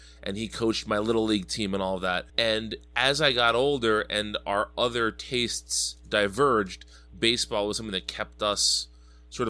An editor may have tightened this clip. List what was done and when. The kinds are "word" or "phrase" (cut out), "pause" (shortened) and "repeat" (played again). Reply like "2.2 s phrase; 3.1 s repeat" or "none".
2.3 s pause